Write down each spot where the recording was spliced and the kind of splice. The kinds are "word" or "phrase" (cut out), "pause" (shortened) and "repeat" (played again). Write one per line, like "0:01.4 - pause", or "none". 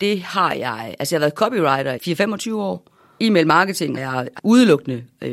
0:02.0 - word
0:03.2 - word
0:04.0 - word
0:04.4 - word